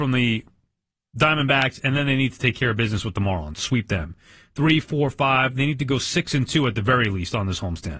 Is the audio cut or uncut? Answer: uncut